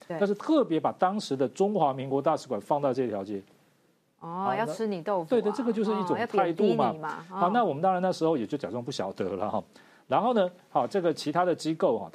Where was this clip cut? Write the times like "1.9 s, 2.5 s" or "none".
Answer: none